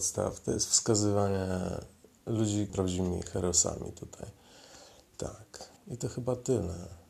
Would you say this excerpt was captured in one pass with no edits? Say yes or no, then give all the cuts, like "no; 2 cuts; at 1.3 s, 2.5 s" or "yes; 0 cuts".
no; 2 cuts; at 2.7 s, 5.8 s